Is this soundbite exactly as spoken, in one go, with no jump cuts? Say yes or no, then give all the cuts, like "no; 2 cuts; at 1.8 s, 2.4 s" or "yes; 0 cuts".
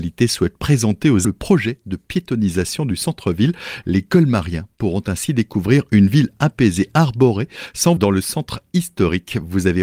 no; 2 cuts; at 1.2 s, 8.0 s